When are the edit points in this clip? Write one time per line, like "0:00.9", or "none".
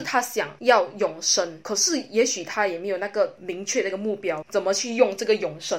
0:04.4